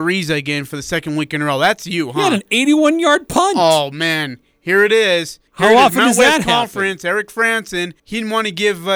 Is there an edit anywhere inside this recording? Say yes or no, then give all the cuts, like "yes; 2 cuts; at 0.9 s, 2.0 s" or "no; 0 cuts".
yes; 2 cuts; at 5.5 s, 8.0 s